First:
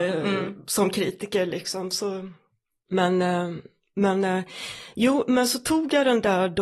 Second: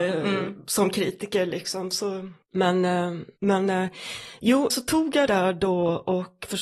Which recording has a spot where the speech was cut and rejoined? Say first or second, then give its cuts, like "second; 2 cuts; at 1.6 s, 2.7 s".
second; 4 cuts; at 2.4 s, 3.4 s, 4.7 s, 5.3 s